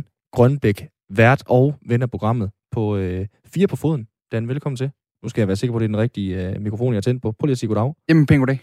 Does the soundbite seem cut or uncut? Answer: uncut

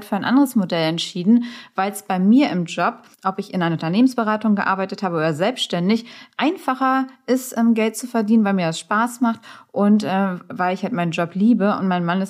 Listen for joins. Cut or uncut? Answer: cut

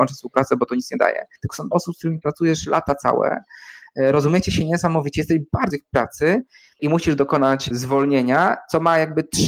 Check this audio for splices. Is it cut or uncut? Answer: cut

